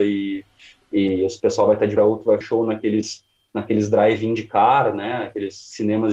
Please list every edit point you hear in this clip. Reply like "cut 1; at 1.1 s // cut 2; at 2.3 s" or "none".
cut 1; at 2.0 s // cut 2; at 2.4 s

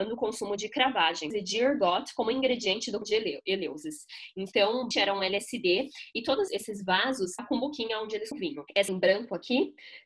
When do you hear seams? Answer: cut 1; at 3.0 s // cut 2; at 4.9 s // cut 3; at 6.5 s // cut 4; at 7.4 s // cut 5; at 8.3 s // cut 6; at 8.9 s

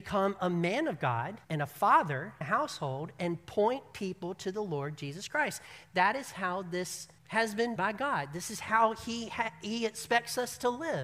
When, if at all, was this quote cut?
cut 1; at 1.4 s // cut 2; at 2.4 s // cut 3; at 7.2 s // cut 4; at 7.8 s

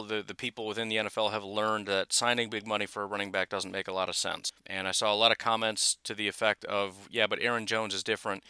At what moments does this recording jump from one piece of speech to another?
cut 1; at 4.6 s

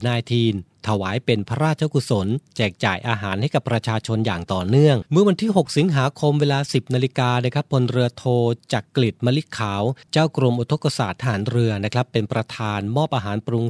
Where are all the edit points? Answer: cut 1; at 5.1 s // cut 2; at 8.9 s // cut 3; at 10.0 s

